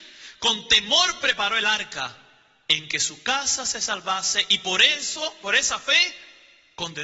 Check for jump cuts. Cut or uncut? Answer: uncut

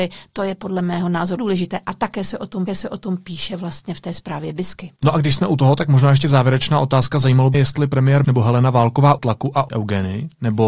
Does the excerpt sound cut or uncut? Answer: cut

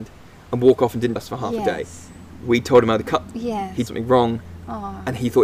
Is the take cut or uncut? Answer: cut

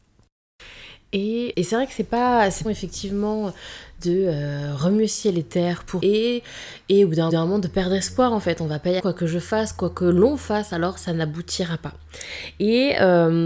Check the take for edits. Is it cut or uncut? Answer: cut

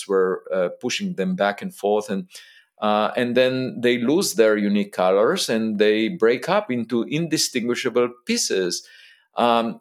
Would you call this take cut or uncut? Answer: uncut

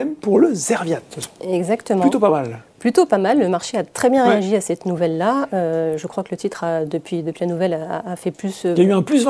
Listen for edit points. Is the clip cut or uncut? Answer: uncut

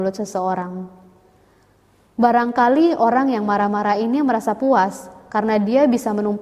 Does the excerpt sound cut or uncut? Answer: uncut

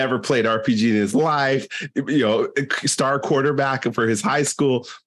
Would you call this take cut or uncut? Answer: uncut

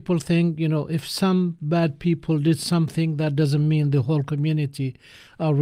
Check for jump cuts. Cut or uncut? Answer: uncut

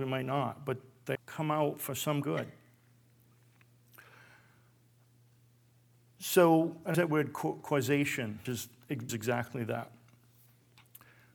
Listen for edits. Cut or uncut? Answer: cut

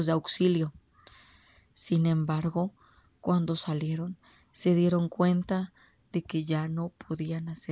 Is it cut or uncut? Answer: uncut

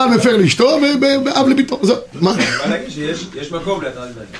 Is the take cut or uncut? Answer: uncut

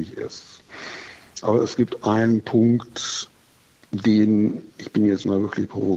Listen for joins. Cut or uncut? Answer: cut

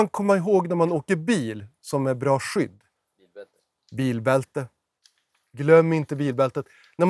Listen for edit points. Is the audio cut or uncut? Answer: uncut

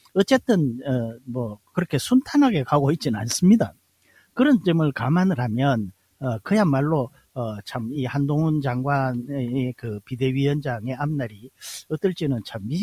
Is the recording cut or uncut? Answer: uncut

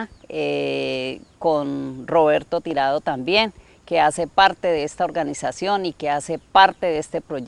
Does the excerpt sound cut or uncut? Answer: uncut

